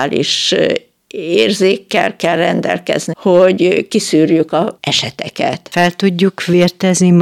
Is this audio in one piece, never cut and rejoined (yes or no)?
no